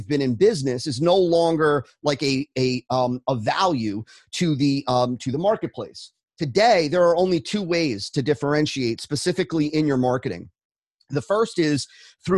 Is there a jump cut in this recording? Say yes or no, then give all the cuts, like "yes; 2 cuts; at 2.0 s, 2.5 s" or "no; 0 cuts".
yes; 1 cut; at 2.5 s